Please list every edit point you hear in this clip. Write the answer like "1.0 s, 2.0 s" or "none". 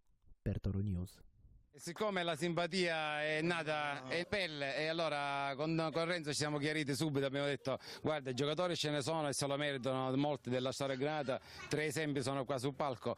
4.2 s